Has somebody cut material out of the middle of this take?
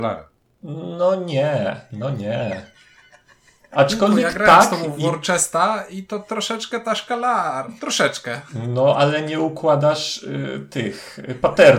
no; 0 cuts

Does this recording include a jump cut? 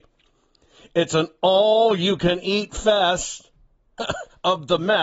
yes; 1 cut; at 4.0 s

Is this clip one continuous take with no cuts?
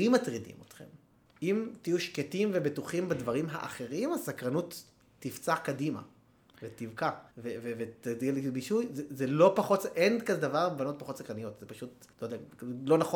no; 4 cuts; at 1.3 s, 5.0 s, 7.3 s, 12.1 s

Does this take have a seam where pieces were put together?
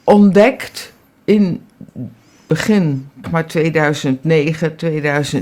yes; 1 cut; at 3.2 s

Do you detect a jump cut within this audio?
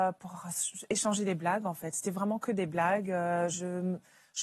no; 0 cuts

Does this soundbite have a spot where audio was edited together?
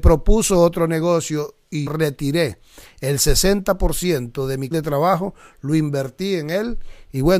yes; 2 cuts; at 1.9 s, 4.7 s

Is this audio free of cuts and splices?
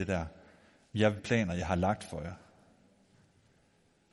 no; 1 cut; at 1.2 s

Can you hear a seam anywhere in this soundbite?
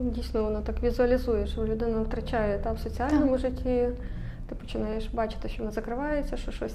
no; 0 cuts

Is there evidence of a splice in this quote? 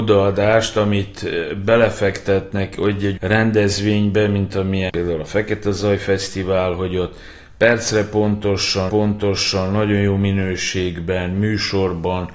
yes; 3 cuts; at 3.2 s, 4.9 s, 8.9 s

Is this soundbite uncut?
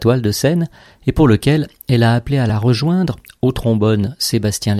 yes; 0 cuts

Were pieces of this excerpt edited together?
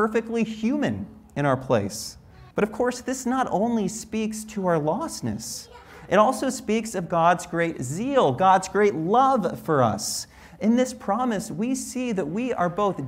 yes; 1 cut; at 2.5 s

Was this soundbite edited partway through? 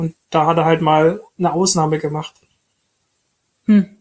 no; 0 cuts

